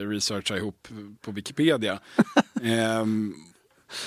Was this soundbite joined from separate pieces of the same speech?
no; 0 cuts

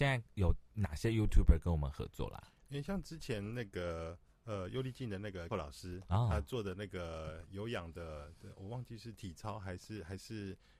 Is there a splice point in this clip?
yes; 1 cut; at 5.5 s

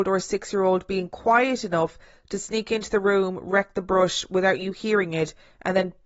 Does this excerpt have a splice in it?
no; 0 cuts

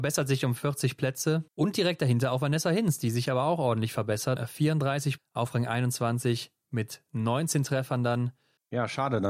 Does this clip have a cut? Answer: yes; 3 cuts; at 1.5 s, 4.4 s, 5.2 s

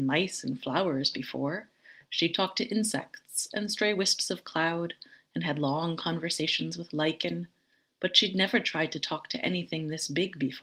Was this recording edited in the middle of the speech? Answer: no; 0 cuts

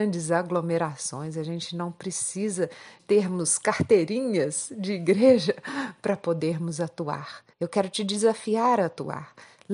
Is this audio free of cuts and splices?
no; 2 cuts; at 3.0 s, 7.5 s

